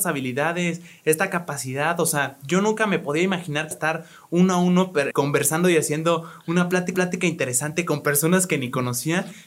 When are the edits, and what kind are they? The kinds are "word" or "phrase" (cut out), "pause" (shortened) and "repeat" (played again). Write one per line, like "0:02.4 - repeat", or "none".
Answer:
0:03.7 - phrase
0:05.1 - word
0:06.9 - repeat